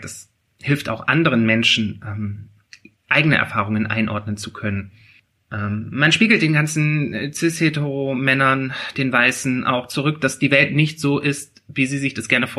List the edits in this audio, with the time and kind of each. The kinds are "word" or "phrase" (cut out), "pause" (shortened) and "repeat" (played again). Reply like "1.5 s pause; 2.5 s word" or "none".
none